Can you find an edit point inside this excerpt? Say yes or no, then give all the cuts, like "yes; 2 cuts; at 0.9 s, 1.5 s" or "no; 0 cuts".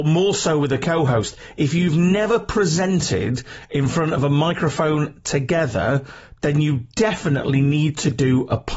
no; 0 cuts